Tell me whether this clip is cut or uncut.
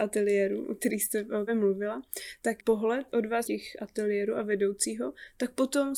cut